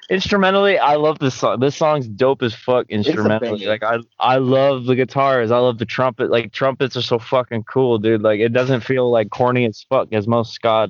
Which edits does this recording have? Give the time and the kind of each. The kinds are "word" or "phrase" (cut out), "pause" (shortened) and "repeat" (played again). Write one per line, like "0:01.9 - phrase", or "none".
none